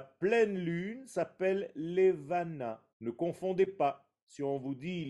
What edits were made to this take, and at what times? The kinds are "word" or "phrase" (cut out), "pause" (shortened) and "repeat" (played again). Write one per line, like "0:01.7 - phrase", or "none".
0:02.9 - pause